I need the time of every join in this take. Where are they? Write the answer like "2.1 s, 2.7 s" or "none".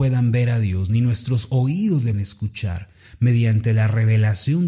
2.1 s